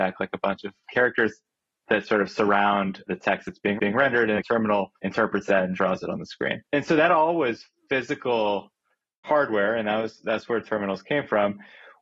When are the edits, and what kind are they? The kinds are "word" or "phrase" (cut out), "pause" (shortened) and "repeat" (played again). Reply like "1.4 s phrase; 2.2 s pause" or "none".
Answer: 3.8 s repeat; 4.4 s word; 5.0 s pause; 6.6 s pause